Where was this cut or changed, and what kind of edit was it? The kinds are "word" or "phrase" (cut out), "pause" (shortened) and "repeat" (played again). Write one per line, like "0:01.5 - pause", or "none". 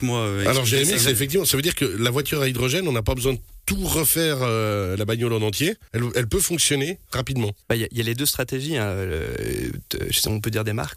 0:05.9 - pause
0:07.6 - pause